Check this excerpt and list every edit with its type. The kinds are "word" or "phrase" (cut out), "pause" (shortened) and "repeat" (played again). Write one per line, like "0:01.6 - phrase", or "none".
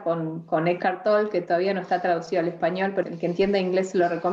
0:03.0 - word